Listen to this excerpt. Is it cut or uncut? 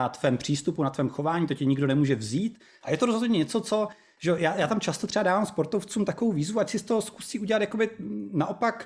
uncut